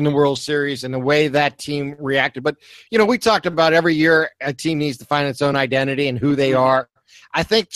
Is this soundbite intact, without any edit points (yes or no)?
yes